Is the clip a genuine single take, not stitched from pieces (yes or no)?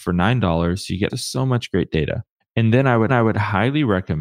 no